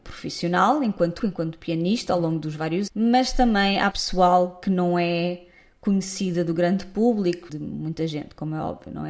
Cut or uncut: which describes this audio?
cut